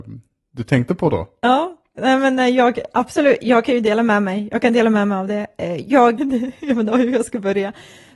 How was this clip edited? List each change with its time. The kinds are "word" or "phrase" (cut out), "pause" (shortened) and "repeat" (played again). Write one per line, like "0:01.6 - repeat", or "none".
0:06.2 - phrase